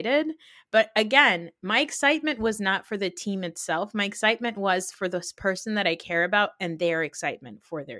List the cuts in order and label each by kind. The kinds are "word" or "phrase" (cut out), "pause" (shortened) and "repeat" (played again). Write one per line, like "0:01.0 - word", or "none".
none